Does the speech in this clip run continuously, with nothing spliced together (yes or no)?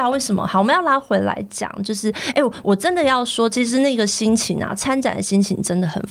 yes